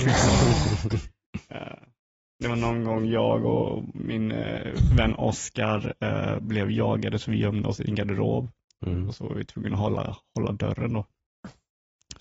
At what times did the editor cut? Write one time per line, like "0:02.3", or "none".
none